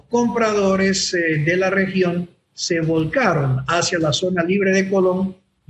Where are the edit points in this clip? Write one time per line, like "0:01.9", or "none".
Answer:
none